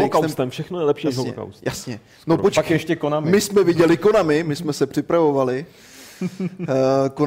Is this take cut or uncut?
uncut